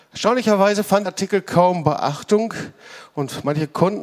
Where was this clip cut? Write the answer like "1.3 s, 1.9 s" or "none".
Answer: 1.1 s